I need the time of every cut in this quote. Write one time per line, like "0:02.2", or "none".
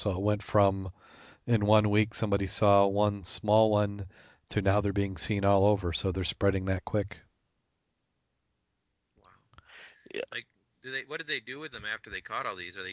none

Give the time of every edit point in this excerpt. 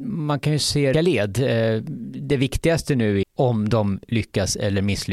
0:00.9
0:02.3
0:03.2

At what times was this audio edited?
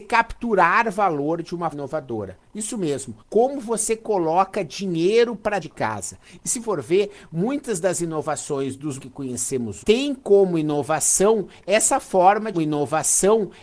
0:01.7
0:03.2
0:05.6
0:06.6
0:09.0
0:09.8
0:12.5

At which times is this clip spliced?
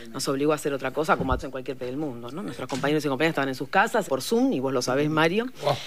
0:01.4
0:01.8
0:04.1

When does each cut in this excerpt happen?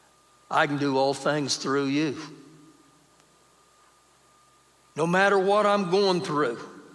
none

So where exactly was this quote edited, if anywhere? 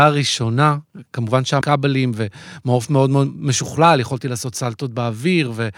0:01.6

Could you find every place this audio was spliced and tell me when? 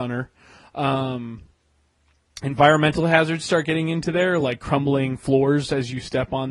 none

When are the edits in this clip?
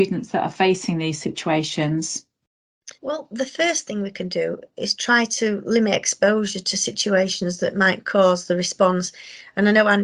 0:02.9

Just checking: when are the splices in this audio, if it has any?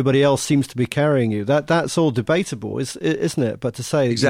none

